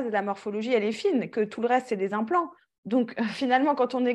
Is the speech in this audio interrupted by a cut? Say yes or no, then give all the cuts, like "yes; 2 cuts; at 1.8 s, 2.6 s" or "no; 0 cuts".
no; 0 cuts